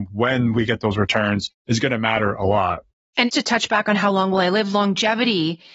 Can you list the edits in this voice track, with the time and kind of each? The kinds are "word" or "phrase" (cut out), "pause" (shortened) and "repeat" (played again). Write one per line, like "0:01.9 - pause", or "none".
0:03.3 - word